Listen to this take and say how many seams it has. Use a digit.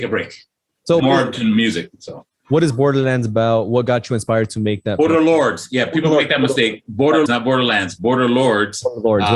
2